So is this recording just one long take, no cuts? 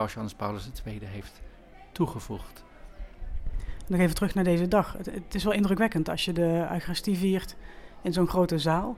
yes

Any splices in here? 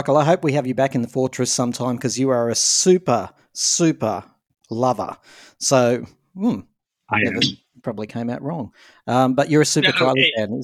no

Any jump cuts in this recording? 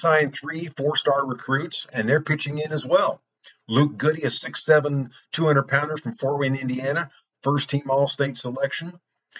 no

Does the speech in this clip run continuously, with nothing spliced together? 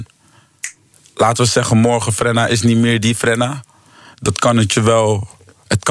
yes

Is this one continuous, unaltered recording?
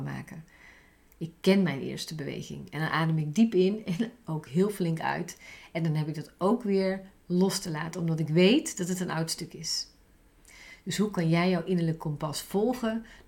yes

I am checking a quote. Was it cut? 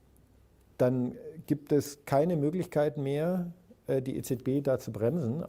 no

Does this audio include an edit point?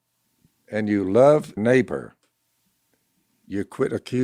yes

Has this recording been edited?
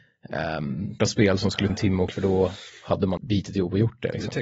yes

